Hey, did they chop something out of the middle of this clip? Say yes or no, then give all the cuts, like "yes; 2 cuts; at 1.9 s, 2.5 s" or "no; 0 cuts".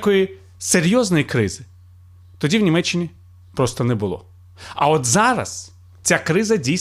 no; 0 cuts